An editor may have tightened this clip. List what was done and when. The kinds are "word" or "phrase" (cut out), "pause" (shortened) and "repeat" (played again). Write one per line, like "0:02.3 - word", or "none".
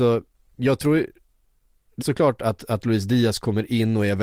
0:02.0 - word